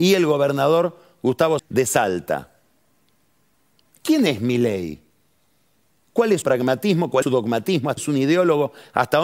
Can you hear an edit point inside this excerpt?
yes; 4 cuts; at 1.6 s, 6.4 s, 7.2 s, 8.0 s

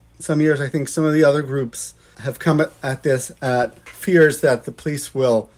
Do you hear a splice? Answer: yes; 1 cut; at 2.1 s

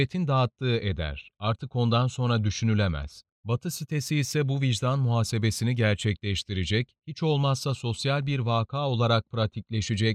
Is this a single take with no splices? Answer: no; 1 cut; at 3.3 s

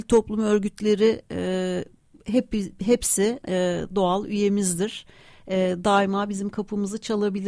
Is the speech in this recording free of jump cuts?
no; 1 cut; at 3.4 s

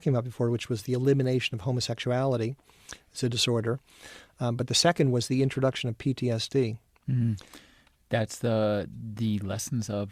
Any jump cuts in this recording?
no; 0 cuts

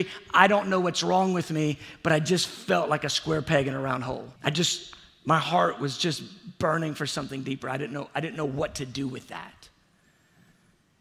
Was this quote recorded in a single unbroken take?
no; 1 cut; at 4.4 s

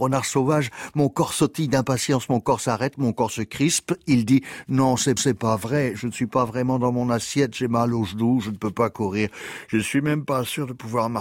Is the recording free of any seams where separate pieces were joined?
no; 1 cut; at 5.2 s

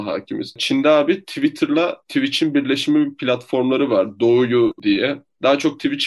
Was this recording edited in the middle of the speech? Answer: no; 0 cuts

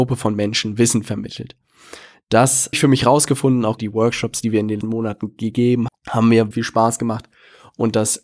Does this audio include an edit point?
yes; 5 cuts; at 2.7 s, 3.8 s, 4.8 s, 5.9 s, 6.5 s

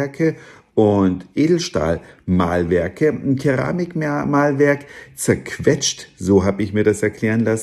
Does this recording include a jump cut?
no; 0 cuts

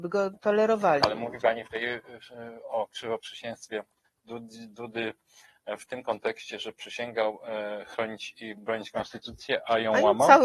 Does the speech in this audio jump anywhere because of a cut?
no; 0 cuts

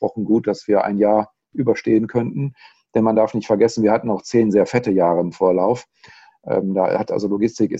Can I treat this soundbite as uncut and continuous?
yes; 0 cuts

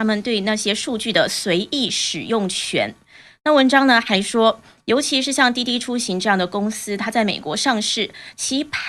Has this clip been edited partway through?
no; 0 cuts

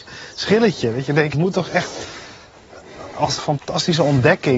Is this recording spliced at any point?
yes; 2 cuts; at 1.3 s, 3.4 s

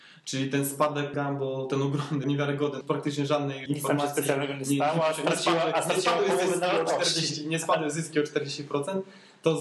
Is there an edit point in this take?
yes; 4 cuts; at 1.1 s, 2.2 s, 2.8 s, 3.7 s

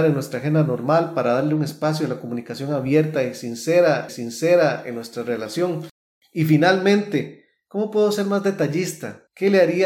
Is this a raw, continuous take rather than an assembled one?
no; 1 cut; at 4.1 s

